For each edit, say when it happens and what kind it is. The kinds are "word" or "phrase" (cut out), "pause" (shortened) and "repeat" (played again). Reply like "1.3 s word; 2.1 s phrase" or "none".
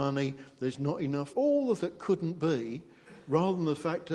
1.3 s word; 1.8 s word